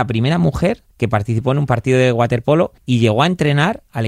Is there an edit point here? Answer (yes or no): yes